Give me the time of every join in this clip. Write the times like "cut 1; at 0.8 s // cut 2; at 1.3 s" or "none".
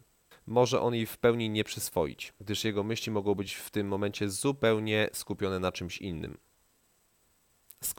none